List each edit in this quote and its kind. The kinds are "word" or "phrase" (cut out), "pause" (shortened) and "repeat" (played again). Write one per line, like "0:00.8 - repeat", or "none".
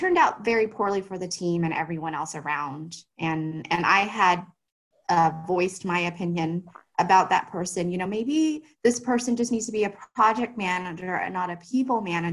none